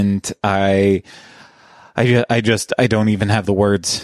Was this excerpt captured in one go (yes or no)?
yes